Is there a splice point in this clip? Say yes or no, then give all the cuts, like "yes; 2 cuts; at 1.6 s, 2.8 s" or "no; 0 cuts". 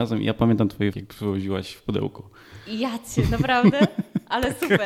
yes; 1 cut; at 0.9 s